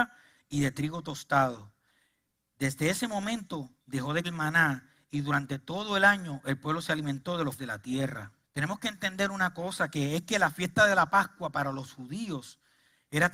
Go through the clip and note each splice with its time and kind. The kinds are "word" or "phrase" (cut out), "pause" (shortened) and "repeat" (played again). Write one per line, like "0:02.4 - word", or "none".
0:03.8 - pause
0:04.2 - word
0:07.6 - word
0:08.4 - pause

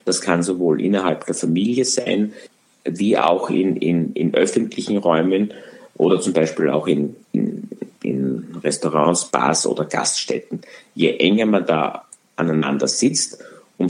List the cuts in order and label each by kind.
none

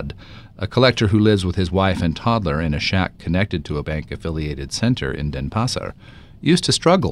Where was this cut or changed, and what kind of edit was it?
0:03.8 - word

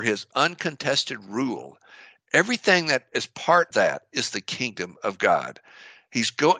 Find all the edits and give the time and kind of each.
0:03.7 - word

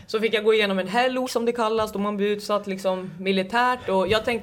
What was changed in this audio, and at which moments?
0:01.2 - word

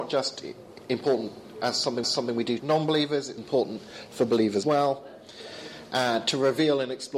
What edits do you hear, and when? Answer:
0:02.0 - repeat
0:02.6 - word
0:03.4 - word
0:04.6 - word

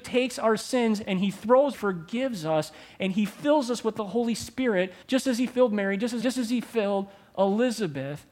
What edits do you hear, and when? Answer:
0:01.7 - phrase
0:05.0 - pause
0:06.2 - phrase

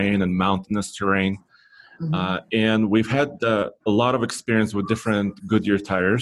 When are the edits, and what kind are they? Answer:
none

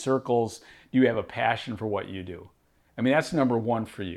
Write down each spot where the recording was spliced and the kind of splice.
none

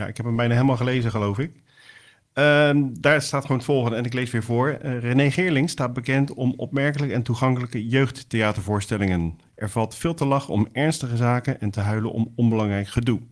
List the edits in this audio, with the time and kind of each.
none

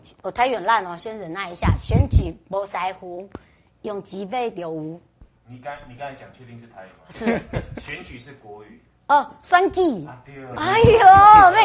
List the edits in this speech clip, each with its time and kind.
none

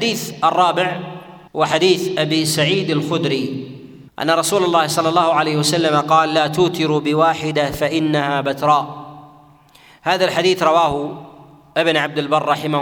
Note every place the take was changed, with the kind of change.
0:01.5 - pause
0:04.1 - pause

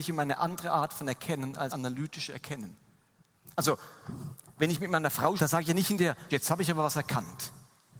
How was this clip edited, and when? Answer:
0:01.7 - word
0:05.4 - word
0:06.3 - word

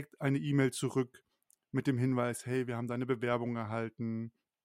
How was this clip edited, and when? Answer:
none

